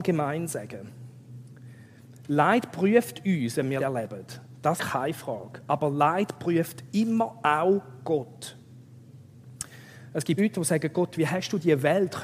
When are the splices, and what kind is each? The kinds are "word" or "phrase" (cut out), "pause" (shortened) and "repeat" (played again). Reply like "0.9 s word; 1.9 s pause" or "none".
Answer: 3.8 s word; 4.8 s word; 10.4 s word